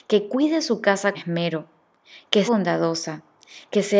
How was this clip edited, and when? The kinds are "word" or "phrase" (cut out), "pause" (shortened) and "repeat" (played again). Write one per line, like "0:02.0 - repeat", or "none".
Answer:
0:01.1 - word
0:02.5 - word